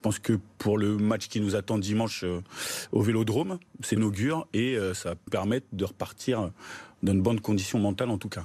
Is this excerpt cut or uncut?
cut